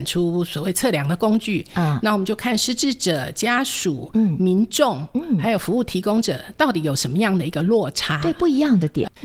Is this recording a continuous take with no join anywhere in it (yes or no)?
yes